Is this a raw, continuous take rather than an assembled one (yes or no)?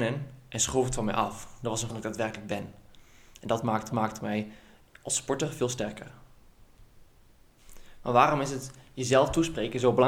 no